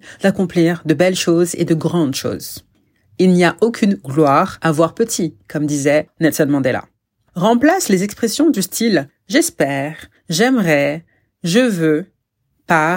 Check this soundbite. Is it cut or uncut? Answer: uncut